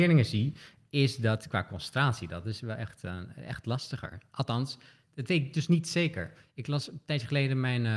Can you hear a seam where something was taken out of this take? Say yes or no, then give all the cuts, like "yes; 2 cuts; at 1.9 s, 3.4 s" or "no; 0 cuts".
no; 0 cuts